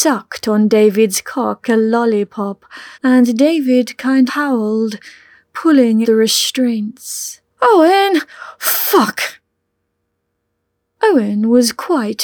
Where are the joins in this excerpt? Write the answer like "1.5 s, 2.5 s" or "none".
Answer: 1.6 s, 2.9 s, 4.3 s, 6.0 s, 7.5 s

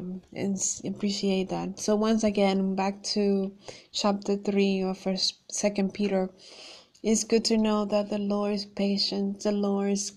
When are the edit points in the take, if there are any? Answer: none

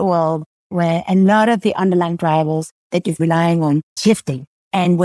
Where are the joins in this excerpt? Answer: 3.2 s, 4.0 s

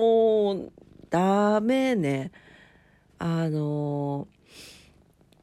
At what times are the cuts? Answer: 1.1 s

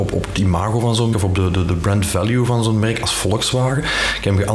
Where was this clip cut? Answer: 1.1 s

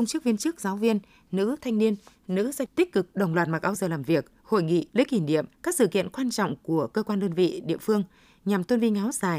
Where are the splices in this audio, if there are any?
2.7 s, 3.8 s, 4.9 s, 5.5 s

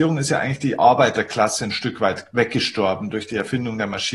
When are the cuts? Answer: none

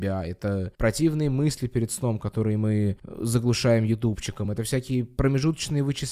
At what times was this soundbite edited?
none

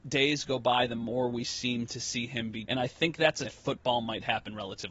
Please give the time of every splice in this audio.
2.7 s, 3.4 s

